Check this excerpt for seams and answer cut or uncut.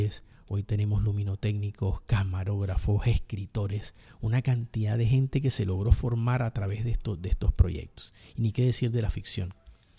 uncut